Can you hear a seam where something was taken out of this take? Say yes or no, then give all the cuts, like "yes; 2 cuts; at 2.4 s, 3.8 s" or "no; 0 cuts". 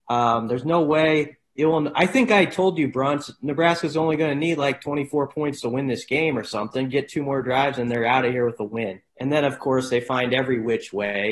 yes; 1 cut; at 9.1 s